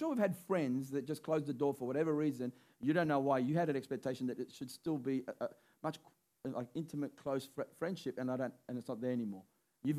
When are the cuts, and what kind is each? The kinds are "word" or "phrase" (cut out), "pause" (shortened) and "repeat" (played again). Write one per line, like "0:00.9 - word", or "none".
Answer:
none